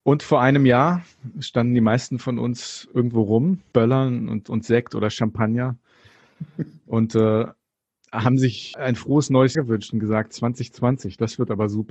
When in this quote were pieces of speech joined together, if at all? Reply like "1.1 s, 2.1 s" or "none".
3.7 s, 8.7 s, 9.5 s